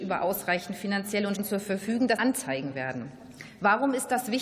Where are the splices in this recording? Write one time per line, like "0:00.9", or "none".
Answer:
0:01.3
0:02.2